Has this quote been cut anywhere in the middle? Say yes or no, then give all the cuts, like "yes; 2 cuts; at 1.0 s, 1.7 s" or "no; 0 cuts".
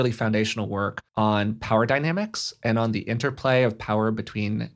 yes; 1 cut; at 1.1 s